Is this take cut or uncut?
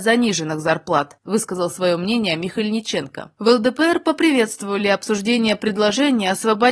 uncut